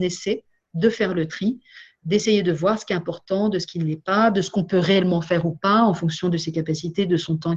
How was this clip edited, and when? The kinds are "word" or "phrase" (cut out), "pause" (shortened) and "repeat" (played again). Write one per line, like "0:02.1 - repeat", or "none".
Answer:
none